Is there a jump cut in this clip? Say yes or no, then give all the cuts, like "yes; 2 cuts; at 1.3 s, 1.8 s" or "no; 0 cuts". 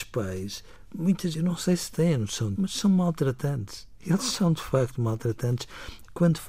yes; 2 cuts; at 1.3 s, 2.6 s